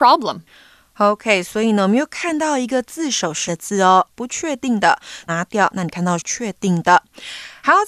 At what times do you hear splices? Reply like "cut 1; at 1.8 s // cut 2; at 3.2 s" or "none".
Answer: cut 1; at 3.5 s // cut 2; at 4.1 s // cut 3; at 5.3 s // cut 4; at 6.2 s